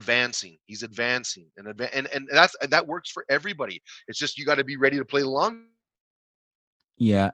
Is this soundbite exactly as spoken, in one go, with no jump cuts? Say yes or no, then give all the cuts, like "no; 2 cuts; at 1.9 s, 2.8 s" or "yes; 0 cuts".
yes; 0 cuts